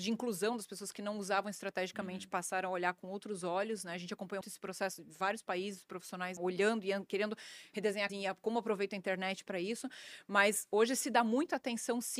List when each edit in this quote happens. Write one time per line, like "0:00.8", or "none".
0:04.4
0:06.4
0:08.1